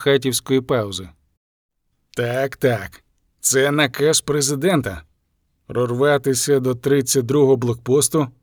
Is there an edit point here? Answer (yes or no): no